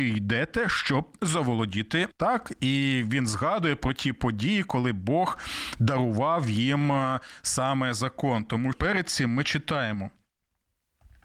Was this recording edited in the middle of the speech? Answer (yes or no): yes